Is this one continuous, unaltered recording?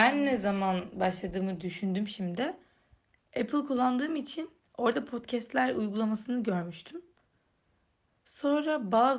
yes; 0 cuts

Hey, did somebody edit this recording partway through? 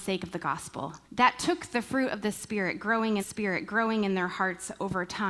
yes; 2 cuts; at 1.0 s, 3.2 s

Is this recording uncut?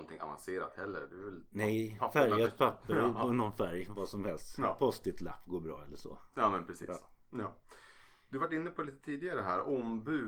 yes; 0 cuts

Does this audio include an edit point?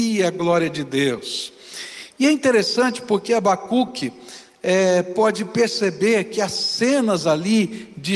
no; 0 cuts

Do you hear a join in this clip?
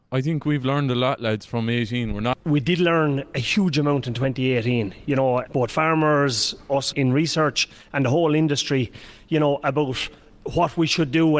yes; 2 cuts; at 5.5 s, 6.9 s

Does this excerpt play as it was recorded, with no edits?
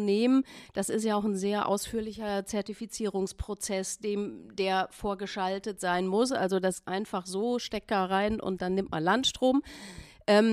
no; 1 cut; at 6.9 s

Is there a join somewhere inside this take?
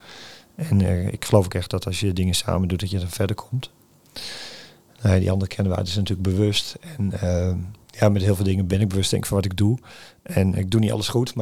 yes; 1 cut; at 7.8 s

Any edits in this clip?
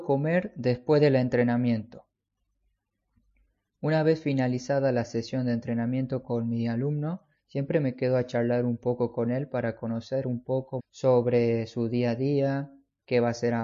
yes; 1 cut; at 10.8 s

